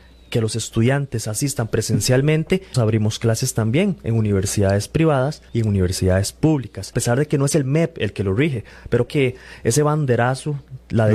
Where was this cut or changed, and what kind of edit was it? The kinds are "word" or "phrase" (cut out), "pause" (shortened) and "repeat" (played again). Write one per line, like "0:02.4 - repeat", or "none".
0:02.7 - word
0:05.5 - pause
0:06.9 - word
0:09.1 - word